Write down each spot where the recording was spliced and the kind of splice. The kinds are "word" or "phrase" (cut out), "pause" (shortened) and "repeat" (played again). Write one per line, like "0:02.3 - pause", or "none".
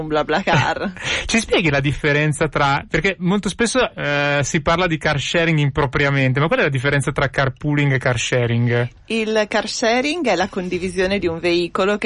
none